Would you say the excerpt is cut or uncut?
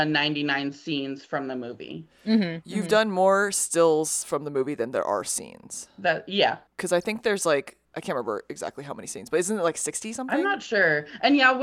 cut